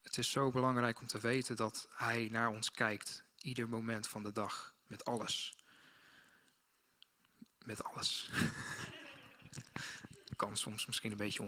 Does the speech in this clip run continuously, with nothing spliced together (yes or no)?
yes